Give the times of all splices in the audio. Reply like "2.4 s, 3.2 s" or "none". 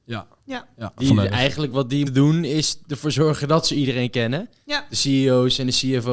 2.1 s